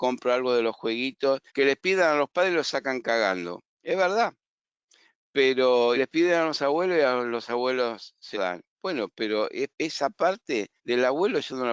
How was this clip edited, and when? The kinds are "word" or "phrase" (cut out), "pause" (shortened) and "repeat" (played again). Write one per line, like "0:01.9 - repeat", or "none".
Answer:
0:01.5 - pause
0:03.7 - pause
0:05.9 - word
0:08.3 - word
0:09.7 - pause
0:10.8 - pause

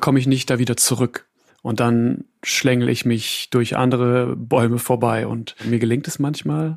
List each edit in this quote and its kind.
0:01.5 - pause

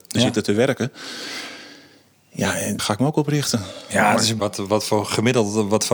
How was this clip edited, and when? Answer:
0:02.8 - word
0:04.4 - word

